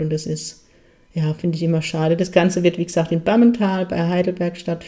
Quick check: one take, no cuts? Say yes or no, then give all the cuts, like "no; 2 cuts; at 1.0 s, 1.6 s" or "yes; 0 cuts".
yes; 0 cuts